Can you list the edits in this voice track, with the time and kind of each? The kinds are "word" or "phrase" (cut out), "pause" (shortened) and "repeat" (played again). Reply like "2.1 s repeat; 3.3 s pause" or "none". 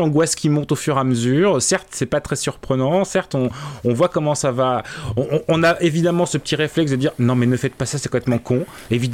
none